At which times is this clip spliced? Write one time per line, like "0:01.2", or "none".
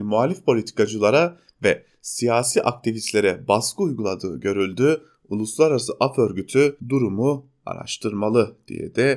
0:06.8